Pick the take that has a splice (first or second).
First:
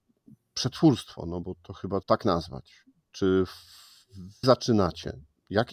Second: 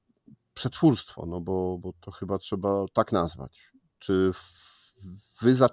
first